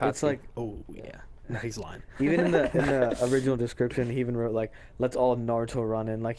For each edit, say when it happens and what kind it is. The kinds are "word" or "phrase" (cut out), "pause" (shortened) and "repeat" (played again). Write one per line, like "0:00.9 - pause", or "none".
none